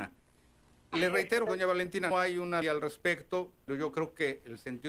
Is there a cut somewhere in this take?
yes; 4 cuts; at 1.5 s, 2.1 s, 2.6 s, 3.7 s

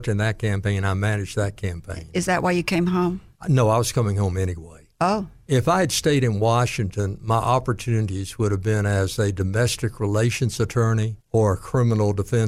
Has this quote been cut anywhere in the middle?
yes; 2 cuts; at 3.4 s, 11.2 s

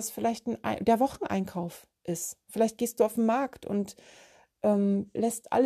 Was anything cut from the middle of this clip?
no; 0 cuts

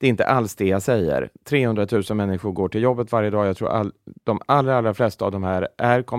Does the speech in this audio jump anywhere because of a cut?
no; 0 cuts

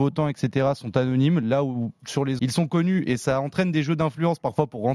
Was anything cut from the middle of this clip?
yes; 1 cut; at 2.4 s

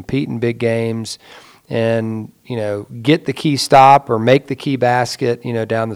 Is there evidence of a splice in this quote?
no; 0 cuts

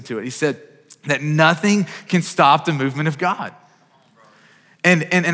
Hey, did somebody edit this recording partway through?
no; 0 cuts

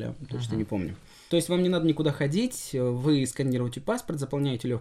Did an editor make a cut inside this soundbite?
no; 0 cuts

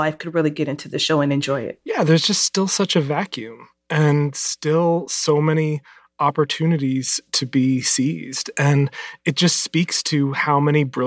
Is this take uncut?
yes; 0 cuts

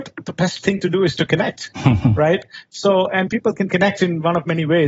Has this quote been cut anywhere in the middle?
no; 0 cuts

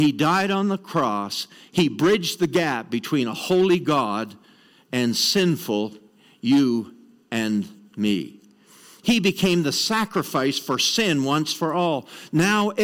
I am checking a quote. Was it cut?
no; 0 cuts

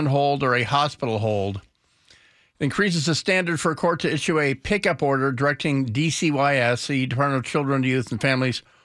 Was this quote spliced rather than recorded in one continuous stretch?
no; 0 cuts

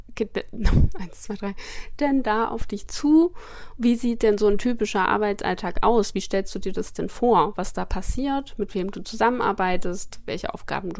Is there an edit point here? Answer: no; 0 cuts

